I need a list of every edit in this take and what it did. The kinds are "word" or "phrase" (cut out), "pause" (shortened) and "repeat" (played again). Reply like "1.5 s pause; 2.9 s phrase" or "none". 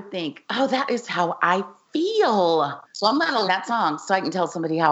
2.8 s pause; 3.5 s word